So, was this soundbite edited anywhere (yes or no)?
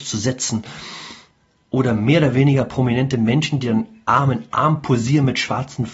no